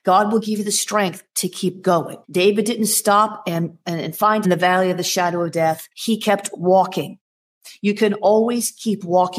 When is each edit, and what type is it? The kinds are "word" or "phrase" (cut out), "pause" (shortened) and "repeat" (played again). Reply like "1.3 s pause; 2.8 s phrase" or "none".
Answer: 2.2 s pause; 4.4 s phrase; 5.9 s pause